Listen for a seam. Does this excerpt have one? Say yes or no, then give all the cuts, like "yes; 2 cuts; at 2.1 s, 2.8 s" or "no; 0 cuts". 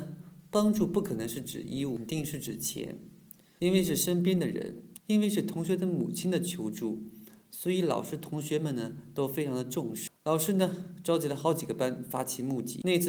no; 0 cuts